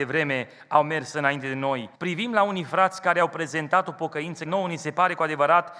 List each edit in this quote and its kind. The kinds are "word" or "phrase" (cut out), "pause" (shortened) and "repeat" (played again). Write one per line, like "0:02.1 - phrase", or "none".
0:01.9 - pause
0:04.5 - word

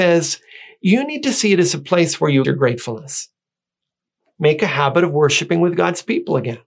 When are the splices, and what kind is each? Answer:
0:02.4 - word

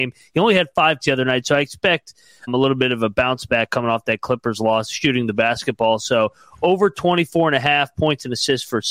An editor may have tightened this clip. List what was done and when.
0:01.0 - word
0:02.5 - word

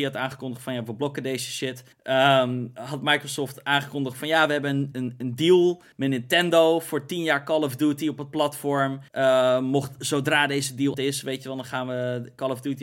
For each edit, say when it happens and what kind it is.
0:01.9 - pause
0:04.9 - word
0:05.9 - pause
0:09.1 - pause
0:10.0 - word
0:10.9 - word

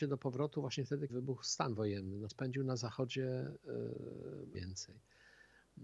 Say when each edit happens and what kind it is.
0:01.1 - word
0:02.3 - word
0:04.5 - phrase

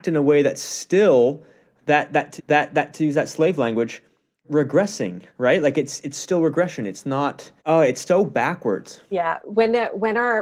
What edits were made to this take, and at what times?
0:02.4 - repeat
0:05.3 - pause
0:07.6 - pause
0:08.1 - word

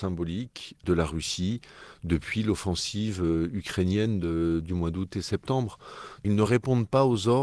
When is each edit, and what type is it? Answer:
none

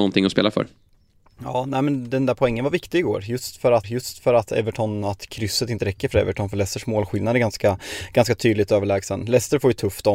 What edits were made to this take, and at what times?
0:03.8 - repeat

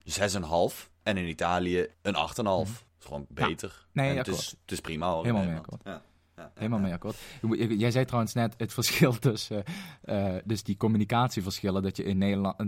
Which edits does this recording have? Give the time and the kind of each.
0:00.9 - pause
0:01.9 - pause
0:02.9 - pause

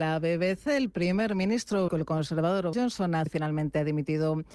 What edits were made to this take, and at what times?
0:01.9 - word
0:02.7 - word
0:03.3 - word

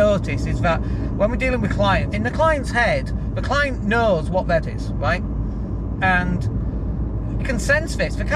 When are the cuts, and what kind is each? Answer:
0:02.1 - word
0:04.6 - word
0:07.4 - word

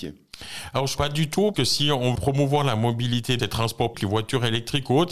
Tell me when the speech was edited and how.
0:01.0 - word
0:01.5 - word
0:02.2 - word
0:03.4 - word
0:03.9 - word

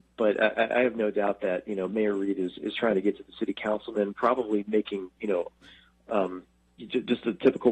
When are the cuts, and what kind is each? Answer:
none

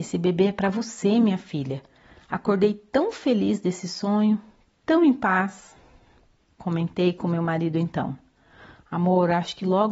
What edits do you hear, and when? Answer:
none

